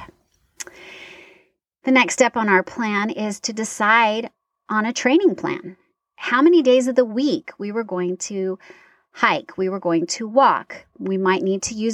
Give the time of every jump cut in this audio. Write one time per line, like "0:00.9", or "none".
none